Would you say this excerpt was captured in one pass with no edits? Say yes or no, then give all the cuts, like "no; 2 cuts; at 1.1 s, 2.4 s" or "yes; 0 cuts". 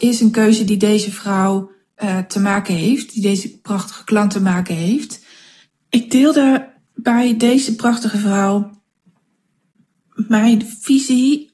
yes; 0 cuts